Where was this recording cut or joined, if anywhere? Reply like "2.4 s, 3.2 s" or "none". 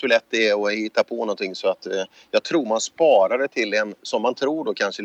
none